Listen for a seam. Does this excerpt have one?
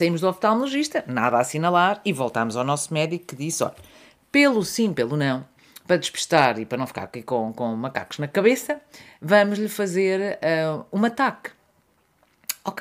no; 0 cuts

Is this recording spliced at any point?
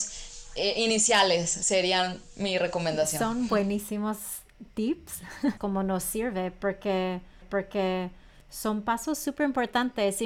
yes; 2 cuts; at 5.6 s, 7.4 s

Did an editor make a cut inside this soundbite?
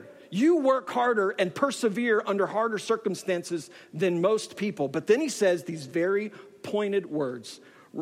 no; 0 cuts

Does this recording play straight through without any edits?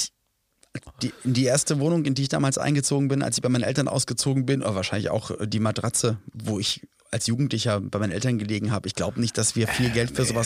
yes; 0 cuts

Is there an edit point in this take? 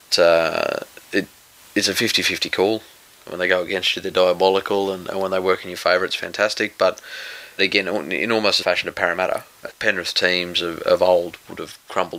yes; 3 cuts; at 7.6 s, 8.6 s, 9.7 s

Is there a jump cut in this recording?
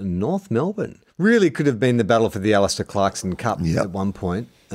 yes; 1 cut; at 1.1 s

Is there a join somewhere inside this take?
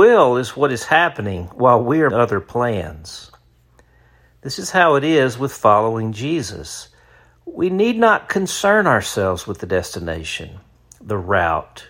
yes; 1 cut; at 2.1 s

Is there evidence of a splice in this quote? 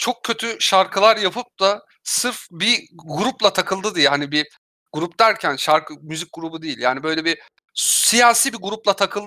no; 0 cuts

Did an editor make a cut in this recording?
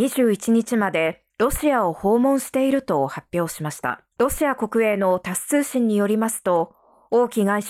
yes; 2 cuts; at 1.3 s, 4.1 s

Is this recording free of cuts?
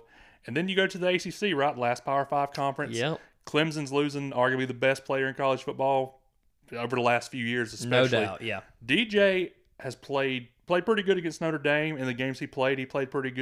yes; 0 cuts

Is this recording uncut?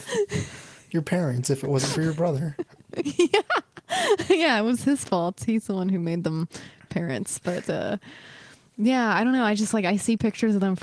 yes; 0 cuts

